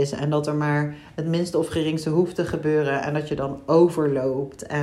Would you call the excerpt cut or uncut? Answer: uncut